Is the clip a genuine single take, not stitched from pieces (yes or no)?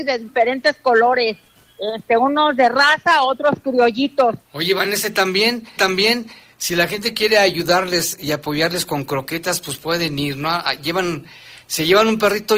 no